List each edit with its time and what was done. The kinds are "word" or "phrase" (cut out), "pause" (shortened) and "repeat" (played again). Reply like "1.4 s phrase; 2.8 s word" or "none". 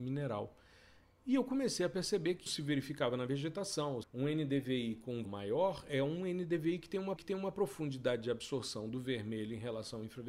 2.5 s word; 4.0 s word; 5.2 s word; 7.2 s repeat